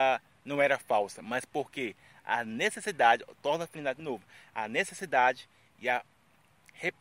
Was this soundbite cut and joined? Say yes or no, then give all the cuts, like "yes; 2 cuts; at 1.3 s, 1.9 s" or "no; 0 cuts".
no; 0 cuts